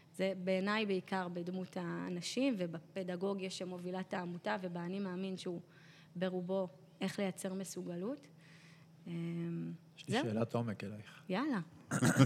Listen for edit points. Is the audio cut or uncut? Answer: uncut